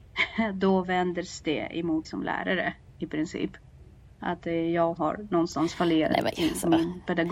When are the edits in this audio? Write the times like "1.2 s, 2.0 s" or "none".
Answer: 2.0 s, 5.0 s